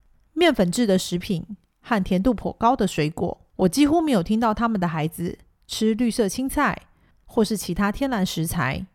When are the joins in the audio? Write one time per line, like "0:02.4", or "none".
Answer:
0:03.5

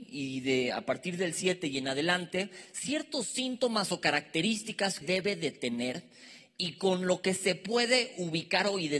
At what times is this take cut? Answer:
0:05.0

